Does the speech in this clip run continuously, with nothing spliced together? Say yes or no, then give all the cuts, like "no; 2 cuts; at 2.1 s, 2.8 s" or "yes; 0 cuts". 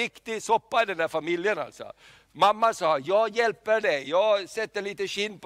yes; 0 cuts